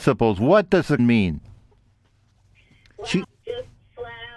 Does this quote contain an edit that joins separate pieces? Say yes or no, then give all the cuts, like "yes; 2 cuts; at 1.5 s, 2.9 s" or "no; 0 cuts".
yes; 2 cuts; at 1.0 s, 3.2 s